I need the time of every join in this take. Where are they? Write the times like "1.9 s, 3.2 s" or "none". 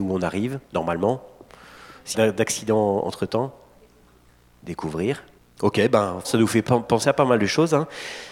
2.1 s, 5.4 s, 6.2 s, 6.7 s